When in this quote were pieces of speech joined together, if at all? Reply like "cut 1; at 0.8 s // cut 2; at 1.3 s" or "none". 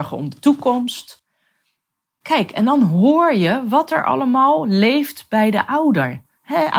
none